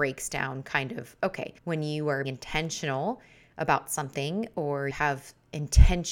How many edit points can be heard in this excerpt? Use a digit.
3